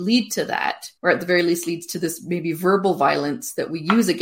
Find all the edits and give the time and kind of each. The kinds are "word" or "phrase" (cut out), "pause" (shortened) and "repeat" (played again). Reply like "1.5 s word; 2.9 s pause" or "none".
1.0 s pause